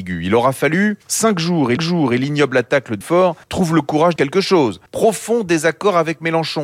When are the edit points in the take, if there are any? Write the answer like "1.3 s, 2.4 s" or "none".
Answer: 1.0 s, 1.8 s, 3.0 s, 3.4 s, 4.2 s, 4.9 s